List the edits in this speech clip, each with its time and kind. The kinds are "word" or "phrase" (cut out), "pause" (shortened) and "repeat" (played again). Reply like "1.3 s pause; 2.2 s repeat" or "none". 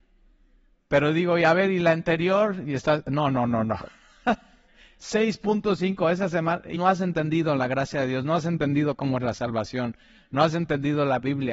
6.7 s word